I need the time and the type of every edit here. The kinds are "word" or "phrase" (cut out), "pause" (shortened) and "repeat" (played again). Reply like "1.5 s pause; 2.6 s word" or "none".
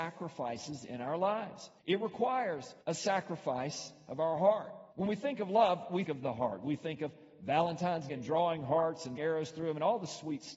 1.8 s pause; 2.8 s pause; 4.9 s pause; 6.0 s word; 8.1 s word; 9.2 s word